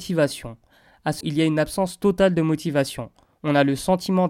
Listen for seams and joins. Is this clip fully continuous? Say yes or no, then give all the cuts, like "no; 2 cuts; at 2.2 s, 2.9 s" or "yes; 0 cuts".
no; 1 cut; at 1.2 s